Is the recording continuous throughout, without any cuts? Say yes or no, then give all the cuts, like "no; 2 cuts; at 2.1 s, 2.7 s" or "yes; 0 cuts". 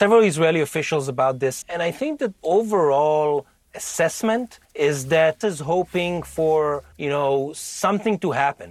no; 5 cuts; at 1.6 s, 2.4 s, 4.6 s, 5.4 s, 6.9 s